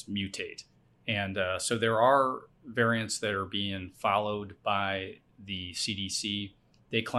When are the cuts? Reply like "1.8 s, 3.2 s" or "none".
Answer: none